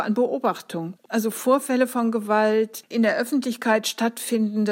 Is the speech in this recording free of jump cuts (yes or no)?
yes